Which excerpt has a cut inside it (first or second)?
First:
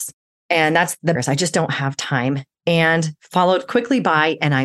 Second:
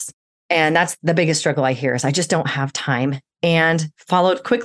first